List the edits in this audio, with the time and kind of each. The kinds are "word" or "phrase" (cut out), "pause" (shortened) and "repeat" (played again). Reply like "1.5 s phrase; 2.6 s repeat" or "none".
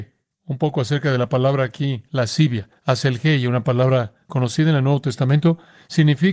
2.8 s pause